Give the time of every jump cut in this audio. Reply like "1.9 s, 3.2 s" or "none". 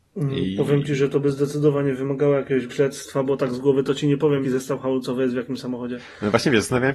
2.7 s, 4.4 s